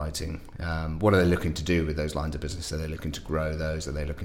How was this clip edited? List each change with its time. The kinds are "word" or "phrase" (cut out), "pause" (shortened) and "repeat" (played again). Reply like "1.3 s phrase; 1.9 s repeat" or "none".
none